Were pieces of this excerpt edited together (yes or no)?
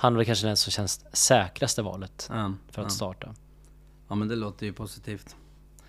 no